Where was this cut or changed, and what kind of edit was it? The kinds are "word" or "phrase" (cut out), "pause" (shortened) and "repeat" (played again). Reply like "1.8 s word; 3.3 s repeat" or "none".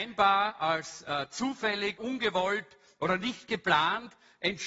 2.0 s word